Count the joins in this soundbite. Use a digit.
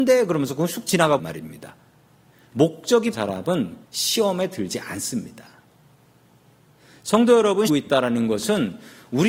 4